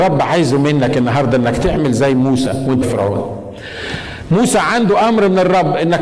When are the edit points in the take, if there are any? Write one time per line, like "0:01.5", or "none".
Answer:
0:02.8